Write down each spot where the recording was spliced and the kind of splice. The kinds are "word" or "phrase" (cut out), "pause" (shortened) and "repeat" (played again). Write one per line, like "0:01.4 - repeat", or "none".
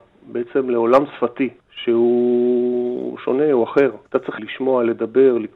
0:01.6 - pause
0:04.1 - pause
0:04.4 - word